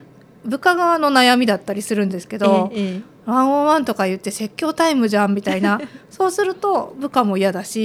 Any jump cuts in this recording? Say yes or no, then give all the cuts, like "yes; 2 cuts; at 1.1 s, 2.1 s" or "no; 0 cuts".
no; 0 cuts